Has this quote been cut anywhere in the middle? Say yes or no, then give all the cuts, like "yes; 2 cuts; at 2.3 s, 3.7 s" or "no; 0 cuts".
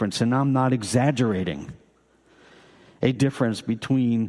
yes; 1 cut; at 3.1 s